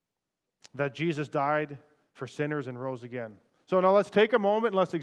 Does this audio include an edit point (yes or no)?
no